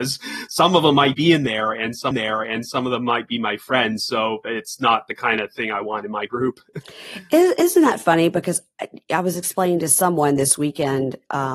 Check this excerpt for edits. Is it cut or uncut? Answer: cut